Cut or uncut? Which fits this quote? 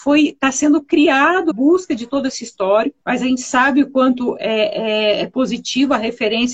cut